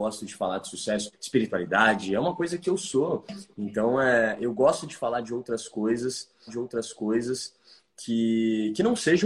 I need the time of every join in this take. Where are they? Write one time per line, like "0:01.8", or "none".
0:01.1
0:06.5